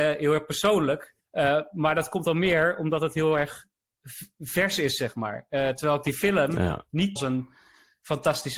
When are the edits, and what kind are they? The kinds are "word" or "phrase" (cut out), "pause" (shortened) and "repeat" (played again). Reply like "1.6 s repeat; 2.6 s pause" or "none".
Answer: 1.2 s pause; 7.2 s phrase